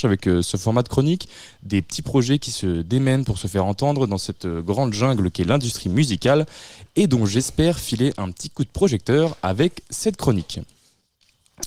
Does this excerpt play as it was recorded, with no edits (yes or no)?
yes